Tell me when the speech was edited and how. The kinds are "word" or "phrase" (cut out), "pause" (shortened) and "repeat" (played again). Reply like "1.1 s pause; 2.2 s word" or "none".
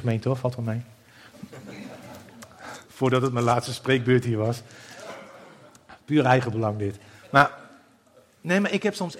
2.9 s pause